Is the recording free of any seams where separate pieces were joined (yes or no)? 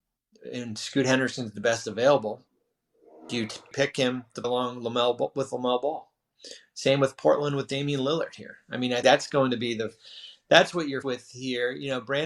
no